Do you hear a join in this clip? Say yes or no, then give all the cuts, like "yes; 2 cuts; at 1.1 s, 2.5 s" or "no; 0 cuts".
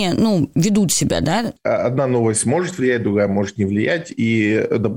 no; 0 cuts